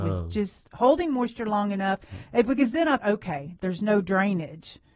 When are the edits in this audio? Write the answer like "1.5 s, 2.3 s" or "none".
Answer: 3.0 s